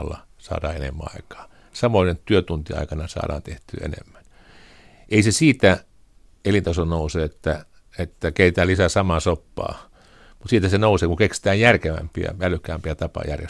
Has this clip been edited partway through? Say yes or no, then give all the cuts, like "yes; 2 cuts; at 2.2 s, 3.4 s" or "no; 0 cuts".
no; 0 cuts